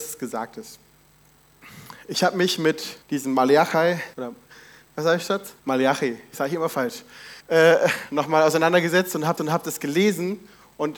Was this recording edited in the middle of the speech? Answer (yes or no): yes